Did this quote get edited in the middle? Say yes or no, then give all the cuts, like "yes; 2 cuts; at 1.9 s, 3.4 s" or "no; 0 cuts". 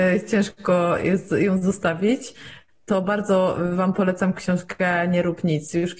no; 0 cuts